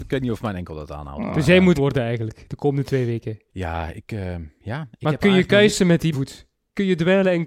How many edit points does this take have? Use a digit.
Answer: 3